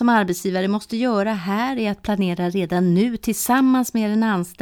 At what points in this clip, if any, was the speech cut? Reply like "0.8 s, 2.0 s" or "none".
none